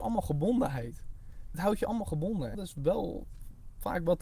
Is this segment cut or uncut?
cut